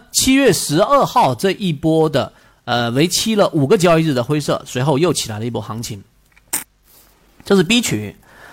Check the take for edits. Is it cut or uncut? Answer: uncut